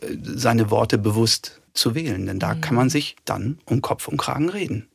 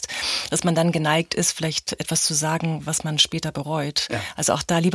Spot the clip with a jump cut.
first; 2 cuts; at 1.7 s, 3.2 s

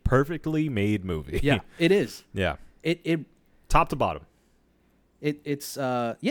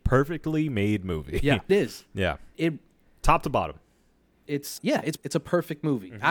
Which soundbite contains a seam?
second; 5 cuts; at 1.7 s, 2.5 s, 4.5 s, 4.8 s, 5.2 s

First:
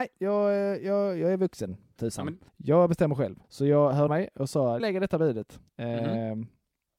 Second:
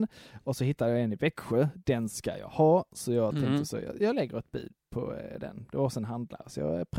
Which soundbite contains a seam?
first; 6 cuts; at 2.0 s, 2.5 s, 3.4 s, 4.1 s, 4.8 s, 5.7 s

